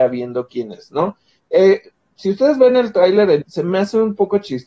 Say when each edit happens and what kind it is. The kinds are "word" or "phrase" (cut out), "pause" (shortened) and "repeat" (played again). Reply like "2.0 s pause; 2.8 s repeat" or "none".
3.4 s word